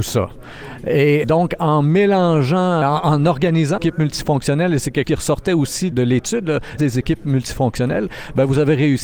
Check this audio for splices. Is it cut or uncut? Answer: cut